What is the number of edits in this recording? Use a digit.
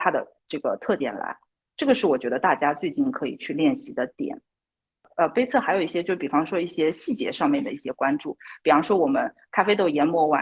0